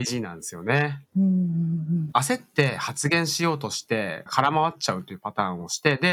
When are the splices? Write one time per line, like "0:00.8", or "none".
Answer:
0:01.0
0:02.1